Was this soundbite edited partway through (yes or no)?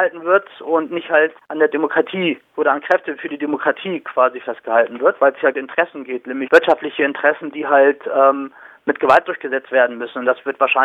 yes